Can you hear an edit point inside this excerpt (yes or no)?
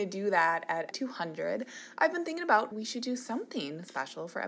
yes